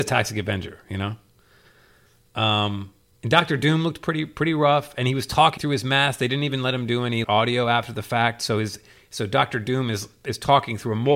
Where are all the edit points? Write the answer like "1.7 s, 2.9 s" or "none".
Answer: 5.6 s, 7.2 s